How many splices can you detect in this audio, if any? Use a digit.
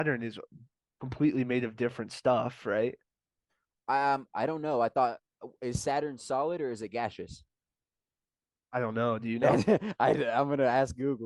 0